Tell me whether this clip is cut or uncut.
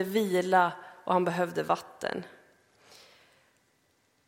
uncut